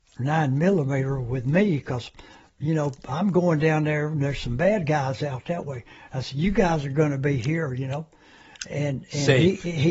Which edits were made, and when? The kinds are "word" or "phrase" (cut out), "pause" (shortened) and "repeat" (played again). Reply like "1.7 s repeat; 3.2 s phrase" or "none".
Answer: none